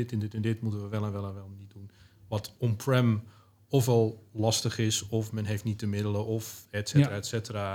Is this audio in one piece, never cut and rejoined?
yes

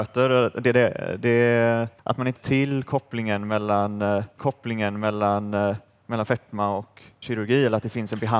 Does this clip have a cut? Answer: yes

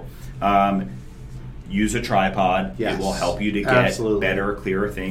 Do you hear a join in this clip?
no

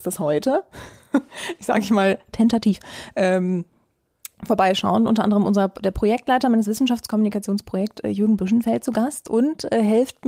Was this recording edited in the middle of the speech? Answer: no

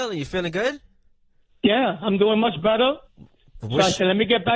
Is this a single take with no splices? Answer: yes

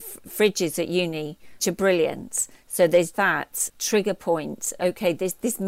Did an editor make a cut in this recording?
yes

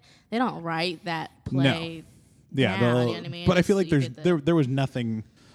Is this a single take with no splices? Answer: yes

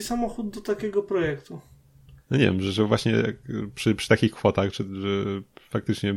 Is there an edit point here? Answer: no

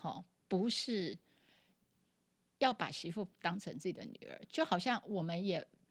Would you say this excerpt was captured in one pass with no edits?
yes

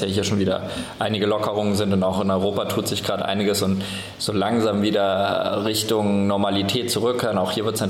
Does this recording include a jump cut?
no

